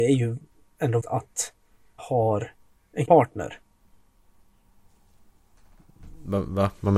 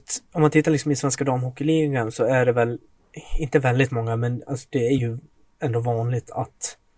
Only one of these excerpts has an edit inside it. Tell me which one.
first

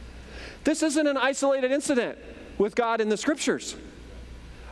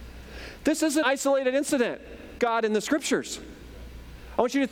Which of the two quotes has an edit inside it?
second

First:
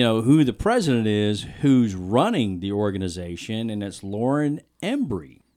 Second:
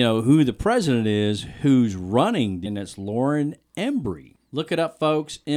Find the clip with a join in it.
second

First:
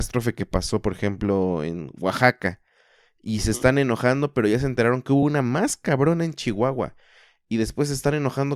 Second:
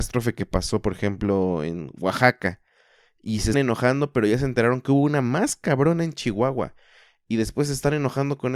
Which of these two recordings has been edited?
second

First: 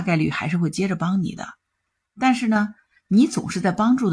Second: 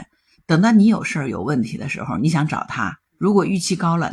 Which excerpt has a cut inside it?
second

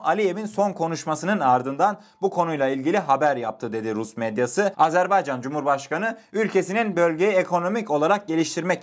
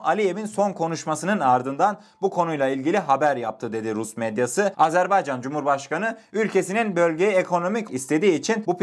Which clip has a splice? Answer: second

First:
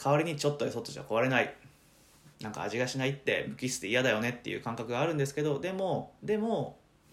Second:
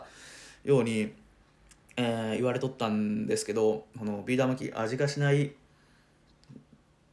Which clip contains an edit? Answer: first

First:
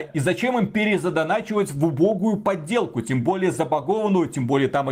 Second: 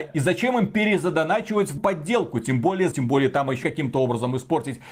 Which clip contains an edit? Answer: second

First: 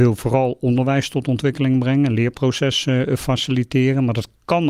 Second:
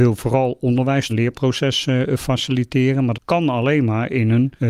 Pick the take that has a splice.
second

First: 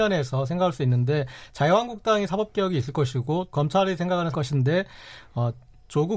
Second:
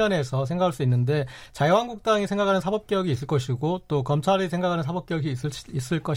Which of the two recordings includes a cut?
first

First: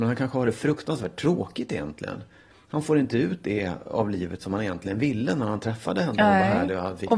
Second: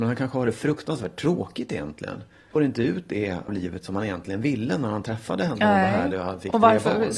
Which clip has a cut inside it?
second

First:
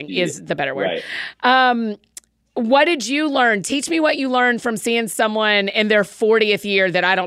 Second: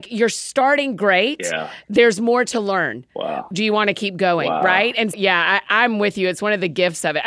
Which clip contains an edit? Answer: second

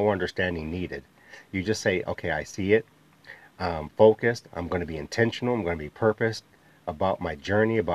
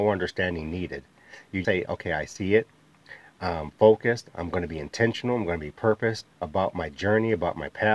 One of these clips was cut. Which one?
second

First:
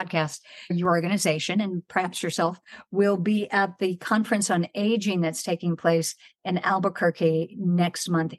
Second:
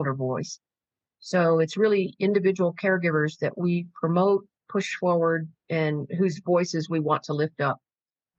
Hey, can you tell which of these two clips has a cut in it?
second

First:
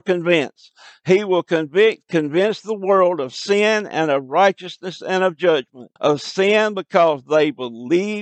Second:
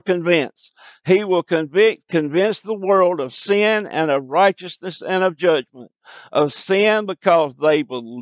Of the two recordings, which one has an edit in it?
first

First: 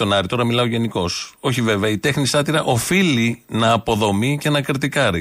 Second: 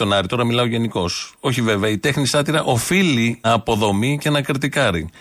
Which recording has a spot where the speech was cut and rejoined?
second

